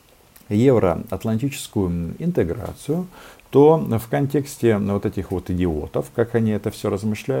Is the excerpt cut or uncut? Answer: uncut